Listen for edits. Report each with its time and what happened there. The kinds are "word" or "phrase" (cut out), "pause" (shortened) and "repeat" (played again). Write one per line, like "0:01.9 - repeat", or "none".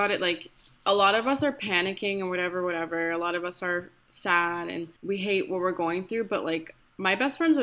0:05.0 - pause